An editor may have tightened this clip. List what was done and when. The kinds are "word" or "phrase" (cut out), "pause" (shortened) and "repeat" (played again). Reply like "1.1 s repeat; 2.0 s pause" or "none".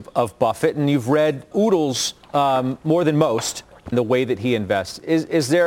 1.5 s word; 2.2 s pause; 3.9 s phrase